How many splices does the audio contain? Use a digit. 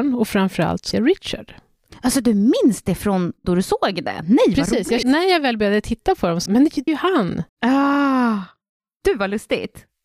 6